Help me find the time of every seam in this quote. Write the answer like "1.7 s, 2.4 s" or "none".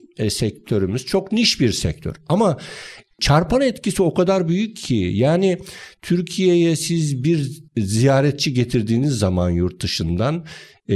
7.7 s